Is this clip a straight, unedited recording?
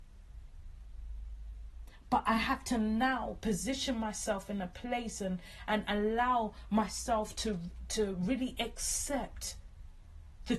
yes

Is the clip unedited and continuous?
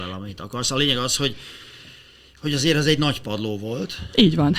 yes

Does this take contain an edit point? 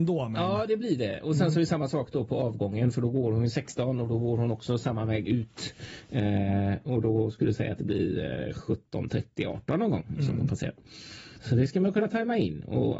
yes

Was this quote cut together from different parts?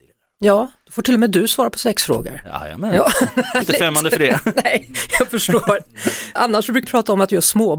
yes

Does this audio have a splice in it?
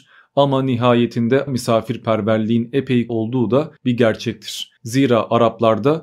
yes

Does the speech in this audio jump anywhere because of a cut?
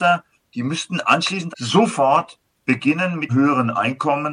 yes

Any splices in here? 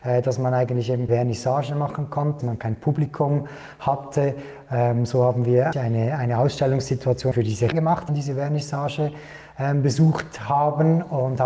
yes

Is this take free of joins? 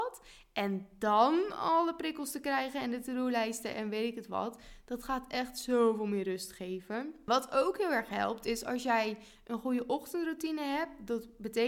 yes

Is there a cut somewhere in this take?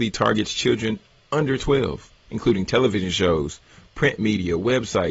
no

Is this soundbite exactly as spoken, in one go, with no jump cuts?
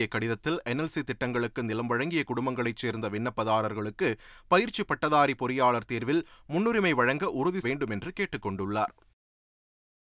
no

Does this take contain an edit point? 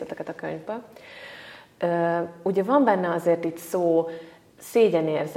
no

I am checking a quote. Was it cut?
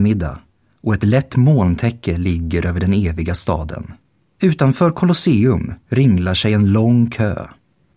yes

